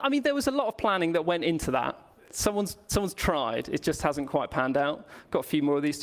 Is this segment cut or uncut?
uncut